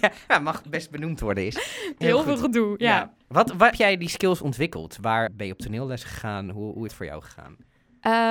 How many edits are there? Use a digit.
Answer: 4